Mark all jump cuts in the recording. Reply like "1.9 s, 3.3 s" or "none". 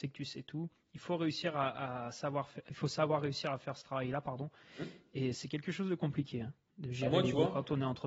none

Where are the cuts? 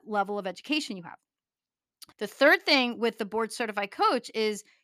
2.1 s

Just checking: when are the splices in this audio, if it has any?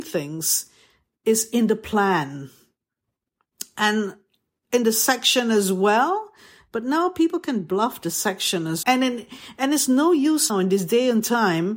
8.8 s, 10.5 s

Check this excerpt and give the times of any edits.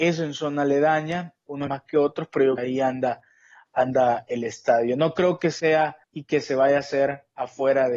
1.7 s, 2.6 s, 6.0 s

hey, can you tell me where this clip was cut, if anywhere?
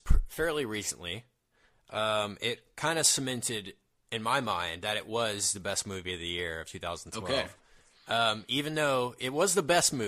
none

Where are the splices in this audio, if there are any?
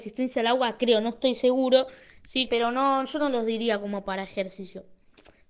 2.5 s

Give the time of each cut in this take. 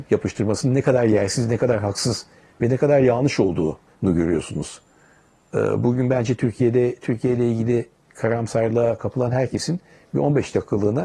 3.9 s

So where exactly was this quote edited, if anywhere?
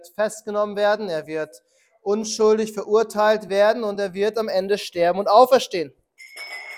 none

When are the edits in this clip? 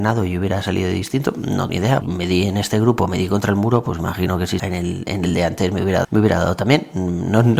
1.7 s, 2.0 s, 4.6 s, 6.0 s

